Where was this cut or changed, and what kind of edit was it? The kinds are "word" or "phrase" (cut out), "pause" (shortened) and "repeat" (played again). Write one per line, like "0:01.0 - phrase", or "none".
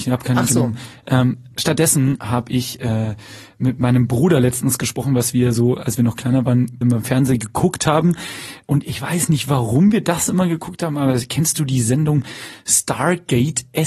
0:02.2 - word
0:06.8 - word

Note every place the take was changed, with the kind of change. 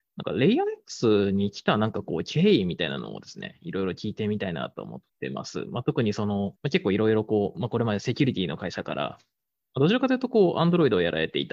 0:05.1 - pause
0:06.6 - pause

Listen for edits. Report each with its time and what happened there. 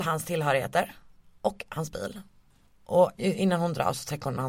none

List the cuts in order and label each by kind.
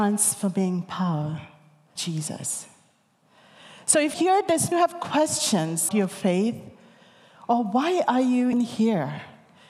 0:02.0 - word
0:04.1 - word
0:04.7 - phrase
0:05.9 - word
0:08.5 - word

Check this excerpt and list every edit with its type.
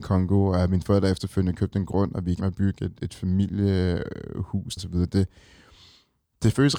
0:02.4 - word
0:03.0 - word
0:04.8 - word

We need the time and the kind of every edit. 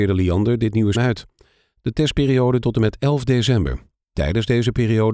0:00.9 - word
0:02.6 - word

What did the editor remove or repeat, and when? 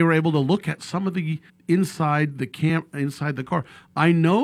0:01.5 - phrase

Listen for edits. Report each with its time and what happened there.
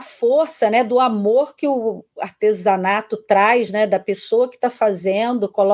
none

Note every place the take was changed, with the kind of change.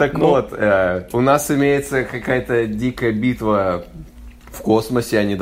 none

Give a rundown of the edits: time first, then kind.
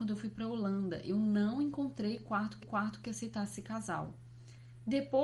0:02.6 - repeat

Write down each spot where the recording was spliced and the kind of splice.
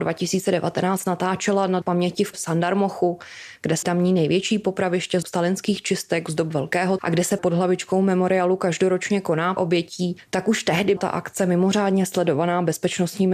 0:01.8 - word
0:02.3 - word
0:03.8 - word
0:05.2 - word
0:07.0 - word
0:07.4 - word
0:09.6 - word
0:11.0 - word

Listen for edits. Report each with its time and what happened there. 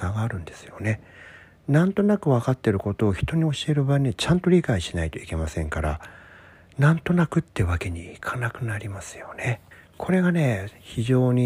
0:09.7 - pause

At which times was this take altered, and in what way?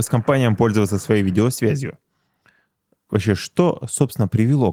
none

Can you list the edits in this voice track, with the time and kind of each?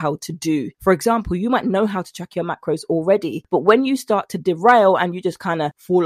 none

